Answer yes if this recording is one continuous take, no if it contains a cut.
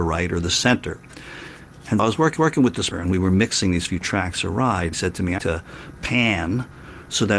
no